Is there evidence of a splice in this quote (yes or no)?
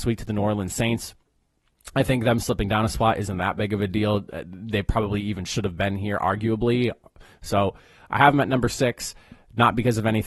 no